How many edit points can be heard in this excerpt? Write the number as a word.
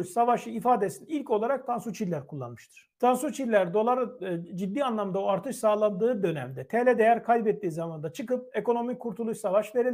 one